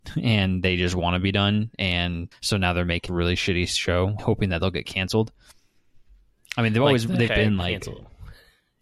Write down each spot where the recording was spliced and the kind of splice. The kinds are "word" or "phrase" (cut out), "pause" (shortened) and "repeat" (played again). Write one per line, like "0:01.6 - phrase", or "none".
0:02.3 - pause
0:03.1 - word
0:04.2 - word
0:07.3 - word